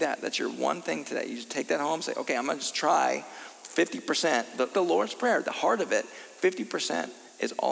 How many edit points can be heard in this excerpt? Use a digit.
1